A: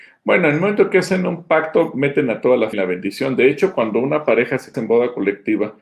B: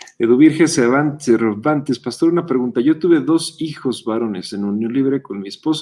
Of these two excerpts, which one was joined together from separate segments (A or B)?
A